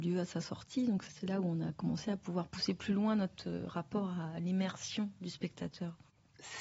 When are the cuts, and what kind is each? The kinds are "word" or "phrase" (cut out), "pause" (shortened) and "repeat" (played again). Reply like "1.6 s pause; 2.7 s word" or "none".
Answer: 1.1 s word